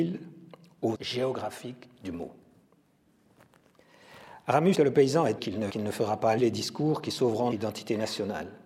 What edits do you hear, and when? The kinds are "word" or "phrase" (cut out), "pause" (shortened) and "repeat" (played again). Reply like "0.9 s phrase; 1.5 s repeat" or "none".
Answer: 0.9 s word; 4.7 s word; 5.4 s word; 5.7 s word; 6.4 s word; 7.5 s word